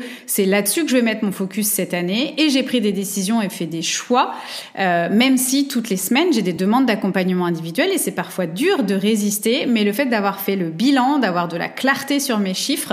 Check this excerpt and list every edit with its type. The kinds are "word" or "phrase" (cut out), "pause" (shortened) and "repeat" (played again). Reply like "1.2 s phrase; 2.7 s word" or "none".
none